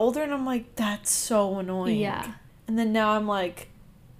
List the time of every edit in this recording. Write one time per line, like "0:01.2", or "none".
0:02.5